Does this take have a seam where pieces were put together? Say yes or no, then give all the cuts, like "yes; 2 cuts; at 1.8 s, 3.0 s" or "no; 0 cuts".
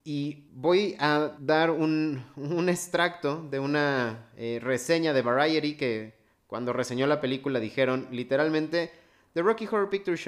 no; 0 cuts